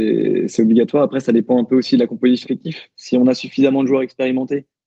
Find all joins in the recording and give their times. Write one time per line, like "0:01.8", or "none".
0:02.4